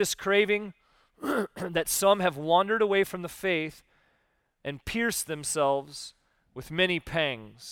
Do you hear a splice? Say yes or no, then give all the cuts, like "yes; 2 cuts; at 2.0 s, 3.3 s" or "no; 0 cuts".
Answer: no; 0 cuts